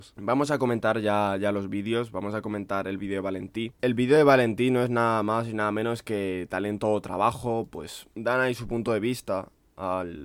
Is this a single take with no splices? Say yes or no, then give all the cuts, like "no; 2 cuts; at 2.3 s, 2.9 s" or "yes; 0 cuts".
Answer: yes; 0 cuts